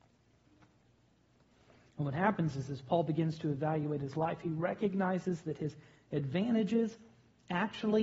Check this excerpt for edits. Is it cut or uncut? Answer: uncut